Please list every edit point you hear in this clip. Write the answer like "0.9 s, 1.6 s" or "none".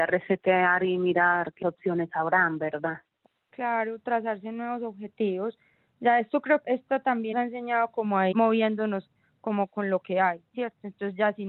1.6 s, 6.6 s, 7.3 s, 8.3 s